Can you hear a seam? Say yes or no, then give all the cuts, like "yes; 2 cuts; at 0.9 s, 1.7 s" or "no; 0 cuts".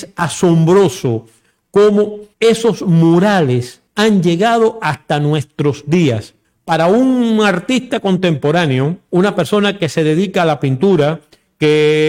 yes; 4 cuts; at 2.3 s, 3.9 s, 6.4 s, 9.0 s